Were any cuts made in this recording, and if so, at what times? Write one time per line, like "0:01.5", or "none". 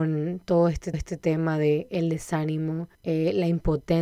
0:00.9
0:02.9